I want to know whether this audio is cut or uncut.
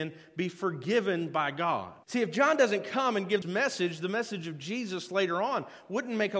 cut